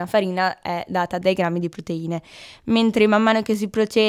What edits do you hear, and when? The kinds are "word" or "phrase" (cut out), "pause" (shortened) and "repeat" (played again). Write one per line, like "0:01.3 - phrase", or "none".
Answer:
0:01.2 - word